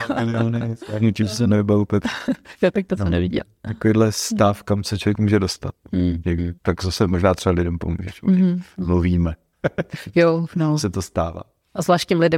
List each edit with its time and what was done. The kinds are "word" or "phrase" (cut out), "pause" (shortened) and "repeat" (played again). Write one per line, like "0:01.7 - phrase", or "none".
0:06.6 - pause